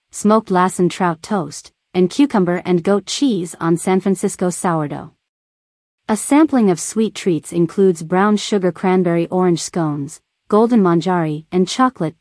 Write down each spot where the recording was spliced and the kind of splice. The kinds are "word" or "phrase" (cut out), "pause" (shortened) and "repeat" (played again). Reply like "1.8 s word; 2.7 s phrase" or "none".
none